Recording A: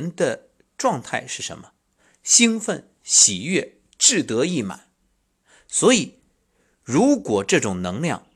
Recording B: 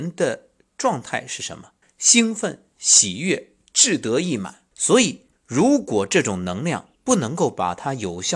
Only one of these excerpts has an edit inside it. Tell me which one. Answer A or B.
B